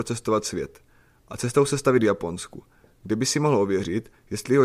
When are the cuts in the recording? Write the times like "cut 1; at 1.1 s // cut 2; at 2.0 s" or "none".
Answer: none